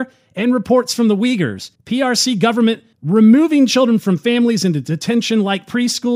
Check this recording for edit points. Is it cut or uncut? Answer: cut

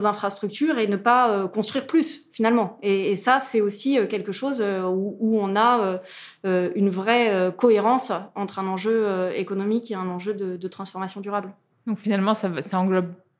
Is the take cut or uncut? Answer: uncut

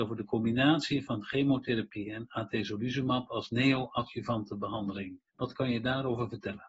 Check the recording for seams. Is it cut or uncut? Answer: cut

